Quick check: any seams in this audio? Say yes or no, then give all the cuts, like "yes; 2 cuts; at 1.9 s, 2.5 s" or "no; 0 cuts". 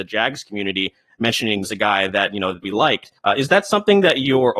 yes; 3 cuts; at 1.6 s, 2.6 s, 3.2 s